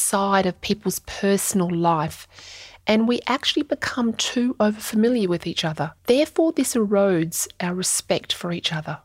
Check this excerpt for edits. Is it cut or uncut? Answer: cut